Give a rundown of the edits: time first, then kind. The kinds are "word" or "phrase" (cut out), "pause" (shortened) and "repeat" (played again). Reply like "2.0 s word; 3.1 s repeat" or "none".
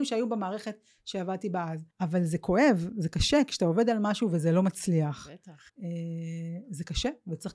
1.9 s pause; 5.7 s pause